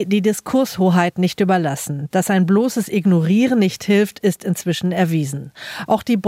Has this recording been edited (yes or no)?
no